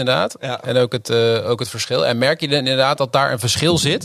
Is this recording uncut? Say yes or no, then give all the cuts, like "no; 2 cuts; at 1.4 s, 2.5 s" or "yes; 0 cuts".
yes; 0 cuts